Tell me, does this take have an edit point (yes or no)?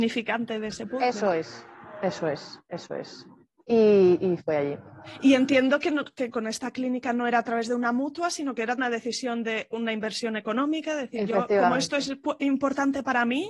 yes